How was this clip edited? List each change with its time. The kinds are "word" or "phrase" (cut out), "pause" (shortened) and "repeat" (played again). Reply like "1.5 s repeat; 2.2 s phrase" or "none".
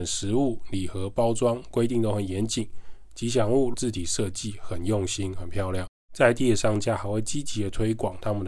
3.7 s word